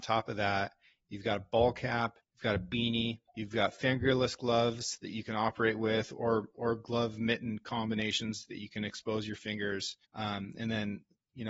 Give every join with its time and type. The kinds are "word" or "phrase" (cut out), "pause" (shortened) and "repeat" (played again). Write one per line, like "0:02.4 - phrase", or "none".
0:02.2 - pause
0:03.3 - pause
0:10.0 - pause